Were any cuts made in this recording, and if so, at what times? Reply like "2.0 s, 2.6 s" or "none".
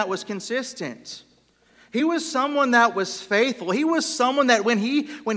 none